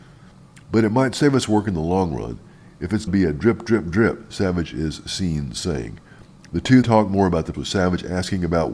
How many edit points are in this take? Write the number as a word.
three